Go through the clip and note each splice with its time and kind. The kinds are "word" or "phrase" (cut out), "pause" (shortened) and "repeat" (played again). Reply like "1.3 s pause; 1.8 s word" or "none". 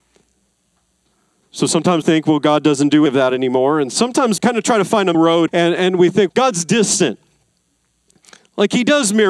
2.0 s word; 3.1 s word; 4.4 s word; 5.1 s word; 5.5 s word; 6.3 s word